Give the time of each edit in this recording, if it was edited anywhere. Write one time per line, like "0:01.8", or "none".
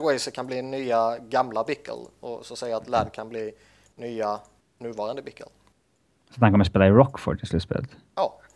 none